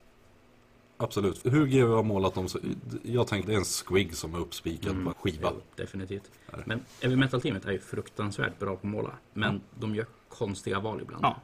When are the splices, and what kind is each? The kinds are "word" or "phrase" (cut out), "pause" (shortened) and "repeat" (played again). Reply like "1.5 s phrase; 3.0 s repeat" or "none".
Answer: 1.4 s word; 3.4 s word; 5.1 s word; 9.2 s pause